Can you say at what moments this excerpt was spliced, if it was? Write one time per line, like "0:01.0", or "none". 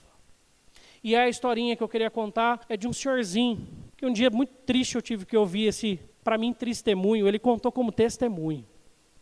0:02.6
0:03.9
0:06.1